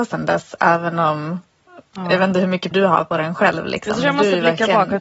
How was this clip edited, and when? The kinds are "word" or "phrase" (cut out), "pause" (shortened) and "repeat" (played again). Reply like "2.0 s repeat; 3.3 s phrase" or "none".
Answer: 1.9 s pause; 2.7 s word